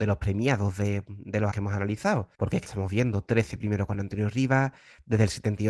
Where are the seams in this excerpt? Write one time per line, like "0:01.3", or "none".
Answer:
0:01.5
0:02.3
0:02.6